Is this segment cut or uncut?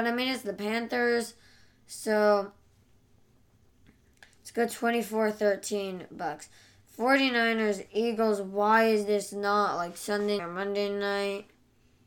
cut